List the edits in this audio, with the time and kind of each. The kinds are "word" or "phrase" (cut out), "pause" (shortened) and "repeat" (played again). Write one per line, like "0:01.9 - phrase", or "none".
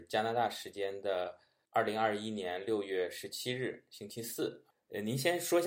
none

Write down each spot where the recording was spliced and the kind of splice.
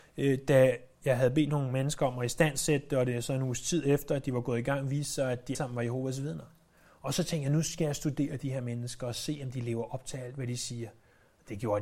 0:05.5 - word

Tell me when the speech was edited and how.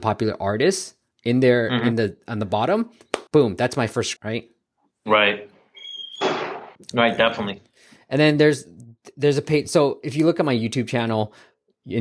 0:03.3 - pause
0:04.2 - word
0:06.8 - pause

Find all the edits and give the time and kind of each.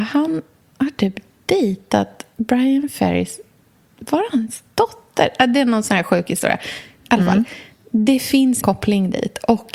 0:08.6 - word

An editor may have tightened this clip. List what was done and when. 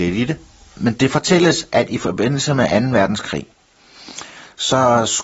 none

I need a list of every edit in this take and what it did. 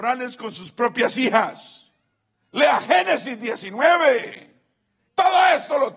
none

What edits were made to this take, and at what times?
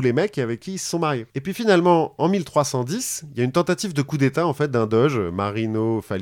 0:01.3 - pause

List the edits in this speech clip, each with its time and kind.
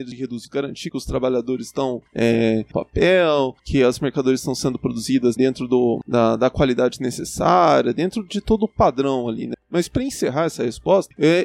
0:02.7 - phrase
0:05.4 - word
0:06.0 - word

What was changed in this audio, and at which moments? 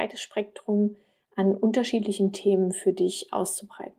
none

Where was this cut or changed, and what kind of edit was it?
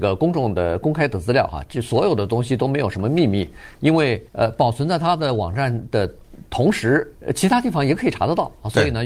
0:04.3 - pause
0:07.1 - pause

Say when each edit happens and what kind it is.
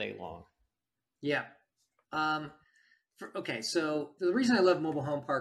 0:04.2 - word

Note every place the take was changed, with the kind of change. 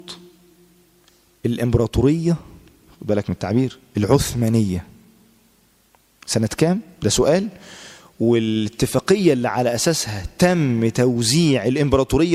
none

